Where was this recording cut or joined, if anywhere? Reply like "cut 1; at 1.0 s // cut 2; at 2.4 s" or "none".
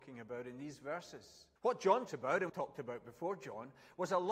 cut 1; at 1.6 s // cut 2; at 2.1 s // cut 3; at 2.5 s